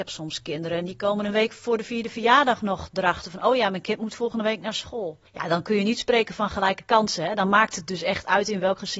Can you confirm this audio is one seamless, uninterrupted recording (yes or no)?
no